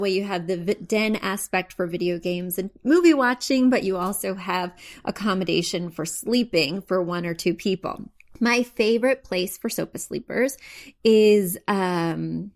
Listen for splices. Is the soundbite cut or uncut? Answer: uncut